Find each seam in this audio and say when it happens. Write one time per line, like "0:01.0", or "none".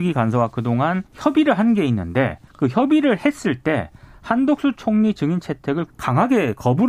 0:01.1
0:02.5
0:05.9